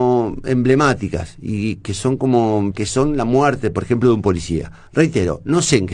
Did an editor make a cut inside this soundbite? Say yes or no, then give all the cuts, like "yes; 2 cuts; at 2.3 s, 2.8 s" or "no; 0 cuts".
yes; 1 cut; at 2.7 s